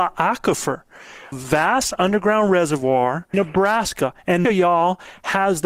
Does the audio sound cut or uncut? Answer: cut